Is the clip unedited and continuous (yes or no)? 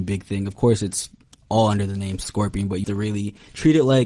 no